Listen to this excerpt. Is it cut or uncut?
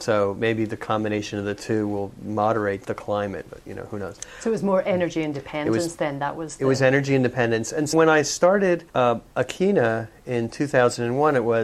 cut